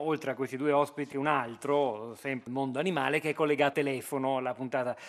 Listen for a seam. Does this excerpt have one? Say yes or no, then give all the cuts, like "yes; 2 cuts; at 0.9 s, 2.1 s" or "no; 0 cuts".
yes; 3 cuts; at 1.1 s, 2.5 s, 3.7 s